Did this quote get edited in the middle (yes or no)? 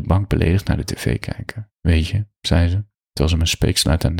yes